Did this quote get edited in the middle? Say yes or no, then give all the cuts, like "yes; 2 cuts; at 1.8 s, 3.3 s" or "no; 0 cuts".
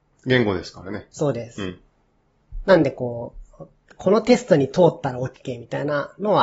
no; 0 cuts